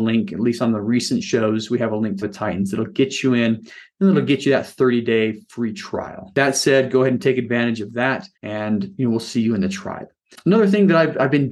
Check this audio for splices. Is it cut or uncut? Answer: cut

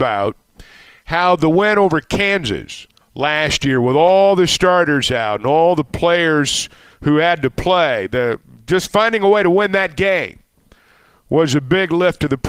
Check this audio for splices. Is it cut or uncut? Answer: cut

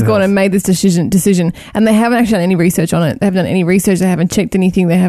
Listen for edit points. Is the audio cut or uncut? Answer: uncut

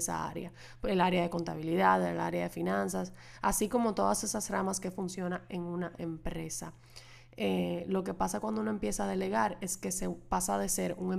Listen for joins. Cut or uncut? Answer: uncut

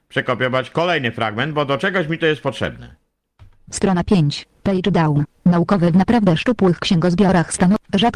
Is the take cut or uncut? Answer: uncut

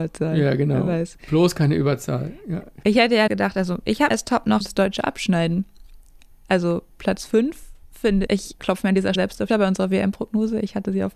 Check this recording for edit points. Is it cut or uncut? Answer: cut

